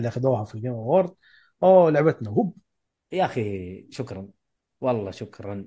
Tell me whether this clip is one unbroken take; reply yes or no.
yes